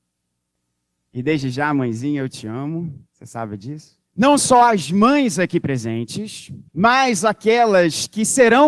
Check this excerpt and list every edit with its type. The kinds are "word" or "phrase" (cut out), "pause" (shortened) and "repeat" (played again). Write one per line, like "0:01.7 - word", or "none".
0:03.1 - pause
0:04.1 - pause
0:06.7 - pause